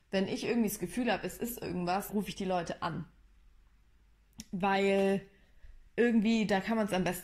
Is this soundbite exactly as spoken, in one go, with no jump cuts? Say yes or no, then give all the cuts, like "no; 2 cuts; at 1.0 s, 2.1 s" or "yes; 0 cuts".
no; 2 cuts; at 2.1 s, 5.9 s